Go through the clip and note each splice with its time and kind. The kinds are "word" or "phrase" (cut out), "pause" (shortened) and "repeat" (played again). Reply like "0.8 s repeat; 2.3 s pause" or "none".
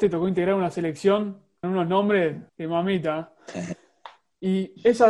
1.6 s word; 2.5 s pause